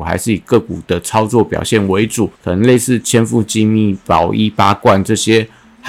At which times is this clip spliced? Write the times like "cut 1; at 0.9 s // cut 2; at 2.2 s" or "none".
cut 1; at 2.4 s